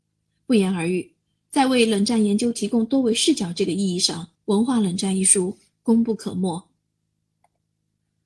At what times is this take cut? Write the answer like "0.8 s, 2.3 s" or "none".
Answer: 4.4 s